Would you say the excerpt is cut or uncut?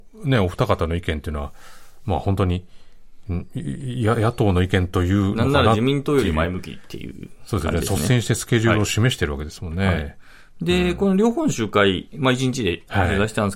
uncut